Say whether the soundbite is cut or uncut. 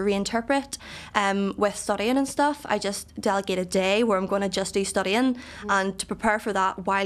uncut